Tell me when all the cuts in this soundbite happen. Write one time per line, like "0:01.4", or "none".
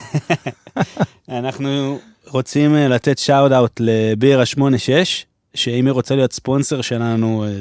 none

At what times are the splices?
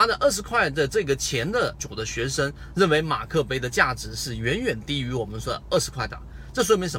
0:01.8

